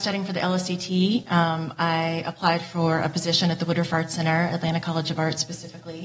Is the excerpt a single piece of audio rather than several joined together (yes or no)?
yes